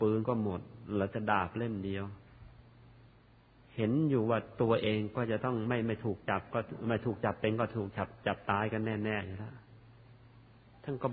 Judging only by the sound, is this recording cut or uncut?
cut